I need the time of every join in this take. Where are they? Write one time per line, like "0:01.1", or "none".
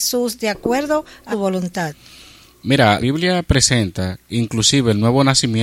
0:01.3
0:03.0
0:04.3